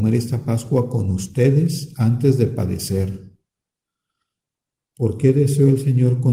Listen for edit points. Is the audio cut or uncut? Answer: uncut